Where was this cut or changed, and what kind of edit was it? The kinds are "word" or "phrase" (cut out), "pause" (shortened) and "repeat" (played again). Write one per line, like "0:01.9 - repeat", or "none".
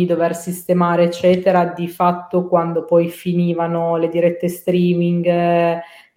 none